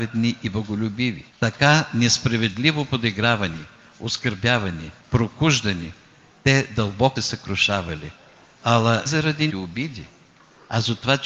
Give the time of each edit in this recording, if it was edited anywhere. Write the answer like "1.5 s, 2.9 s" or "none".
1.3 s, 5.0 s, 7.2 s, 9.1 s, 9.5 s